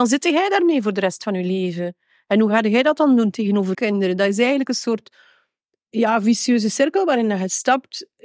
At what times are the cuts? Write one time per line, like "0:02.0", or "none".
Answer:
0:03.7